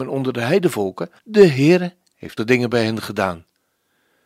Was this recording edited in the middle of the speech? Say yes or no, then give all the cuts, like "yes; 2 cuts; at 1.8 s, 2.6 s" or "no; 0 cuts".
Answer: yes; 2 cuts; at 1.2 s, 2.4 s